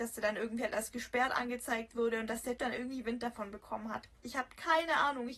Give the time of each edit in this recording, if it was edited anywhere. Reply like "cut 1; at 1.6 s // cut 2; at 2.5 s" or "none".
cut 1; at 2.6 s

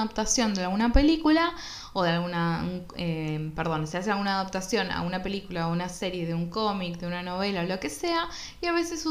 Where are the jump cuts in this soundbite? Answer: none

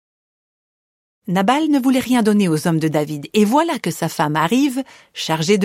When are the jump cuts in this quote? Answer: none

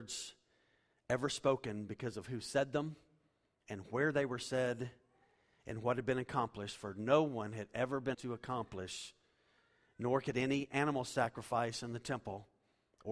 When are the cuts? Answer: cut 1; at 8.1 s

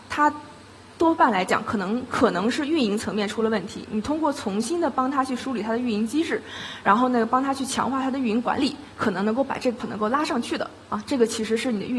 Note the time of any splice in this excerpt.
cut 1; at 9.8 s

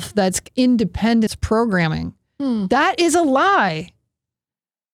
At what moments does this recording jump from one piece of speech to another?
cut 1; at 1.3 s

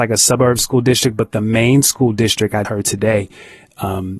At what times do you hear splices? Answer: cut 1; at 2.6 s

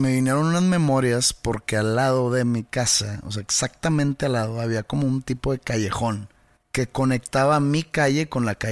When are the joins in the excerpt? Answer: cut 1; at 6.6 s

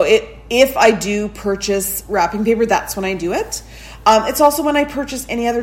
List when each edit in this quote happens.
none

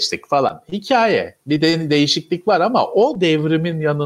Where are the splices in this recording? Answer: none

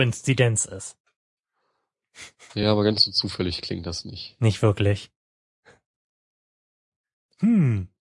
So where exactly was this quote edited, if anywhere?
none

